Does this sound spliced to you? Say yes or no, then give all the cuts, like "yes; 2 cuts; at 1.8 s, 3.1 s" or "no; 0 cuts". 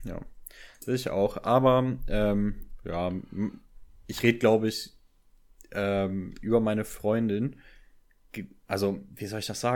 no; 0 cuts